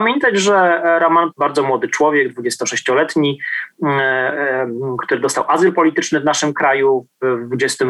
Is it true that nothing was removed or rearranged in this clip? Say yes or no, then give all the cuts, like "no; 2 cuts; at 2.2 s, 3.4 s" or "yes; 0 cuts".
no; 1 cut; at 1.3 s